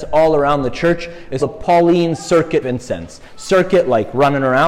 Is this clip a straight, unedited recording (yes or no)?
no